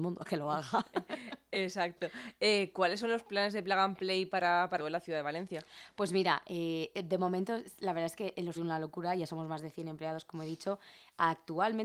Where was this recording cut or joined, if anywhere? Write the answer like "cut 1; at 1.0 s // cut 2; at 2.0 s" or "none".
cut 1; at 4.8 s // cut 2; at 6.9 s // cut 3; at 8.6 s